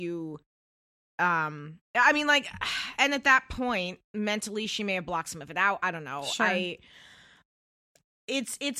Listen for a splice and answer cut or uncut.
cut